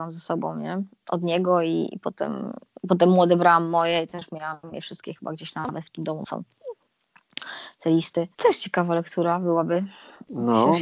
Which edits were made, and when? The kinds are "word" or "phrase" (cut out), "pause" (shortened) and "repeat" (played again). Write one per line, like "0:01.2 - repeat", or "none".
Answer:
0:08.3 - pause